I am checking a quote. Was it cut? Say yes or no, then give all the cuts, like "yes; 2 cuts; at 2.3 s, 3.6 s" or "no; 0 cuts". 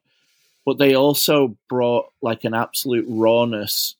no; 0 cuts